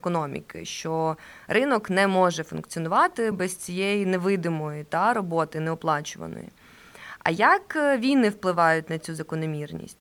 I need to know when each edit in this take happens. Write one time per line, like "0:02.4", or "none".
none